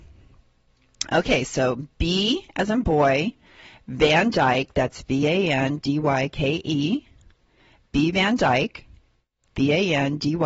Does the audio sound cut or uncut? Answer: uncut